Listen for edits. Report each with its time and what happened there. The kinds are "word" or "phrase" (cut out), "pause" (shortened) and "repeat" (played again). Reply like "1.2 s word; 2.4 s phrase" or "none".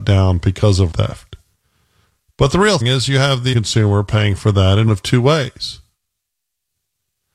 0.9 s word; 2.8 s word; 3.5 s word; 4.9 s word